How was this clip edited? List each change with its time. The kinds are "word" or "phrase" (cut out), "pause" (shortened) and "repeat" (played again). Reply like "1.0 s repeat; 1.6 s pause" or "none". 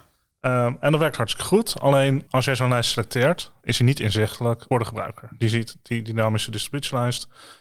2.3 s pause; 4.7 s word